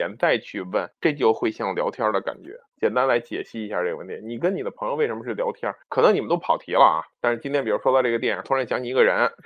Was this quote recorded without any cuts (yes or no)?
no